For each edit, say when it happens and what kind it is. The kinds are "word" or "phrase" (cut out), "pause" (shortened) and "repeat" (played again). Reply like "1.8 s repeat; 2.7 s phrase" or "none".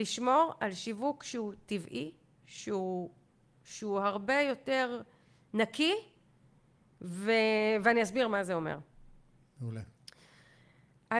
none